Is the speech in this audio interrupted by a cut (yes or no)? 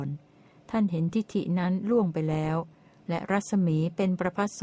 no